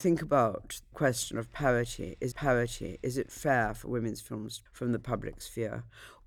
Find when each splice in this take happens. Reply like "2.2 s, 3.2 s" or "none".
0.9 s, 2.3 s, 4.7 s